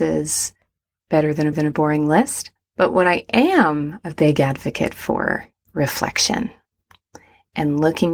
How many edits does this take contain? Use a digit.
3